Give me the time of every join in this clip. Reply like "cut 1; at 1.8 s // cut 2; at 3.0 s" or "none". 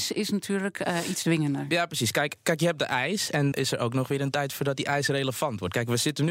cut 1; at 2.4 s // cut 2; at 3.5 s